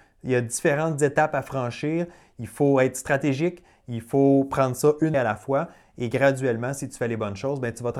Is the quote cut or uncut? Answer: cut